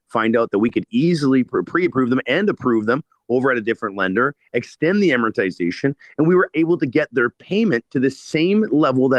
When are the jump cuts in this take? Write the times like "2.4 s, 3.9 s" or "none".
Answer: 1.5 s, 6.5 s